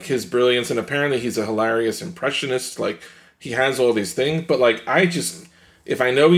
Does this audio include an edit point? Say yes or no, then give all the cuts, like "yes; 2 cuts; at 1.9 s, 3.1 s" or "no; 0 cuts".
no; 0 cuts